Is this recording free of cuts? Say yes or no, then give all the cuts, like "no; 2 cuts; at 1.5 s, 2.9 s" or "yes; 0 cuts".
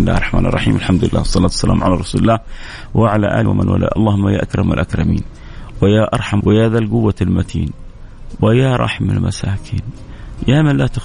no; 2 cuts; at 3.5 s, 6.4 s